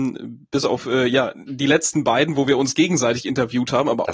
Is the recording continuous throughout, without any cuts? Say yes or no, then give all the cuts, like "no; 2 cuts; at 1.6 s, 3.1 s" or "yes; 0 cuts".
yes; 0 cuts